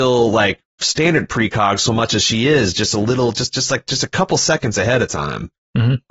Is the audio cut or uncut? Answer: uncut